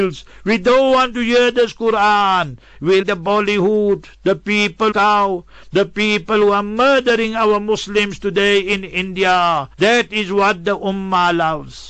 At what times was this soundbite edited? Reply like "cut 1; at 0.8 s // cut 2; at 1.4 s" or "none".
cut 1; at 3.0 s // cut 2; at 4.9 s // cut 3; at 9.7 s